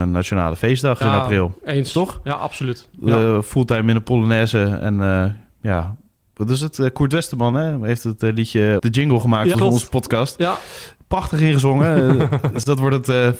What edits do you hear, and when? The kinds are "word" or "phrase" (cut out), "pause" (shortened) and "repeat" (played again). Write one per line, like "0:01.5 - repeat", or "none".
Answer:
0:01.0 - word
0:08.8 - word
0:09.5 - word